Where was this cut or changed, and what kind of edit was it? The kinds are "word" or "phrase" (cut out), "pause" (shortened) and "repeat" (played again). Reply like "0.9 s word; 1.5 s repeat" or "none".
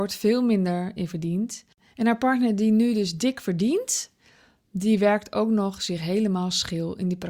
none